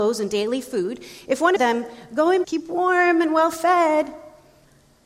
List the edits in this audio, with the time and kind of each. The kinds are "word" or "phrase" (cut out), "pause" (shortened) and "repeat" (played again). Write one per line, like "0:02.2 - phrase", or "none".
0:01.6 - phrase
0:02.4 - word